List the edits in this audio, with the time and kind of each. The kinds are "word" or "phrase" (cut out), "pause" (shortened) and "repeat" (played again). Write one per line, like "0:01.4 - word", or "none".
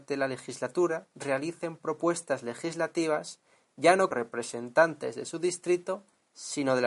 0:04.1 - word